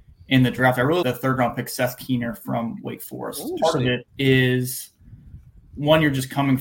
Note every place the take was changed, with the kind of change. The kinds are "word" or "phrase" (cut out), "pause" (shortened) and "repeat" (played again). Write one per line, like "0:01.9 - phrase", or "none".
0:01.0 - word
0:03.6 - phrase
0:04.1 - pause